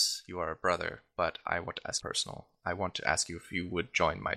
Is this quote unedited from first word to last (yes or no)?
no